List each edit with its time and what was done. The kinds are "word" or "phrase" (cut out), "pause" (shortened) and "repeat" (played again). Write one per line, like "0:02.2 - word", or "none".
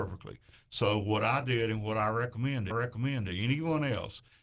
0:02.7 - repeat